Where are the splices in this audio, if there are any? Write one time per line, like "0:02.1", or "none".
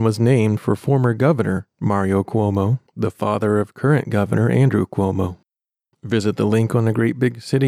none